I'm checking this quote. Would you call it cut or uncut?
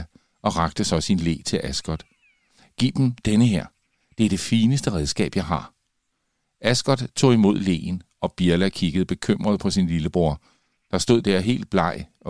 uncut